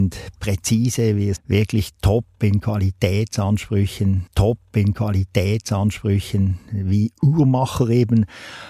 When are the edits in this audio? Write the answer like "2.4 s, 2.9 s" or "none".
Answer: 1.4 s, 4.3 s